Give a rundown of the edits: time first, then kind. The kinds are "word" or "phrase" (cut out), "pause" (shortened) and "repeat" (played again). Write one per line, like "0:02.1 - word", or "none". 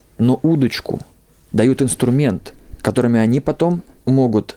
none